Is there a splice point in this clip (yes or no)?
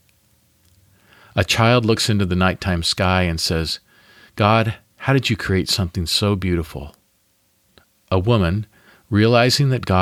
no